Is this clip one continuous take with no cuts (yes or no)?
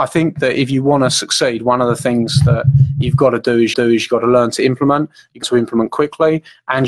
no